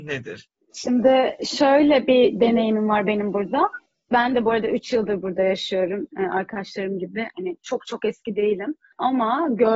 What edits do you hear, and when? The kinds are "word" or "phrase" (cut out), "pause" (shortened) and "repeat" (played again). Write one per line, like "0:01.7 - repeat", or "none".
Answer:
none